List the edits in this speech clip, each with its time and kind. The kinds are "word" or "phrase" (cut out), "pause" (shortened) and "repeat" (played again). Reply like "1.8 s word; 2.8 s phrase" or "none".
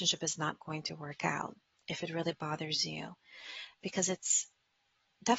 none